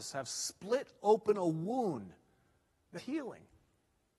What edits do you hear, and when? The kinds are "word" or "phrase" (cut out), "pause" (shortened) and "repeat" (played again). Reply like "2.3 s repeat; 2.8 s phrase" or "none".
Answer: 3.0 s word